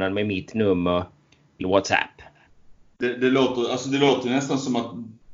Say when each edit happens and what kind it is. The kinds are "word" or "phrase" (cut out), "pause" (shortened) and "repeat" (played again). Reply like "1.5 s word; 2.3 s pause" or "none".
1.6 s word